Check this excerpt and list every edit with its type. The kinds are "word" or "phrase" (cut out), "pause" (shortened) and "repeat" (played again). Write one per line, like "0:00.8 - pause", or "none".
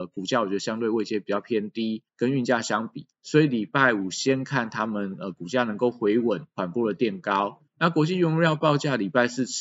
0:02.1 - pause
0:03.1 - pause
0:07.7 - pause